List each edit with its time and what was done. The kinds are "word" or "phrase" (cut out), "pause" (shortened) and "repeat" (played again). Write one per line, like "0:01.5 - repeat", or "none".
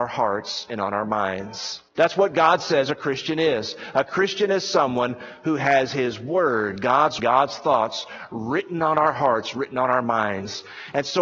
0:01.9 - pause
0:07.2 - phrase